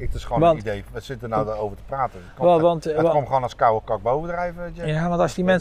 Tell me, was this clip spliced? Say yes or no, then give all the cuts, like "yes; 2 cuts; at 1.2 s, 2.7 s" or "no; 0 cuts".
no; 0 cuts